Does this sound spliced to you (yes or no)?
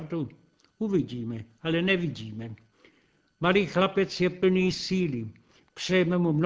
no